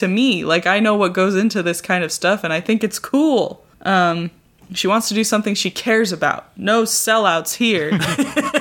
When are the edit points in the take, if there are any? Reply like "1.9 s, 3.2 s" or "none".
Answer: 3.7 s